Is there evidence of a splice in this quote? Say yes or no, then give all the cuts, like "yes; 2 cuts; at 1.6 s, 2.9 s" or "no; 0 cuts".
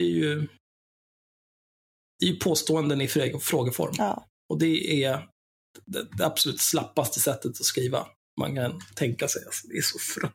no; 0 cuts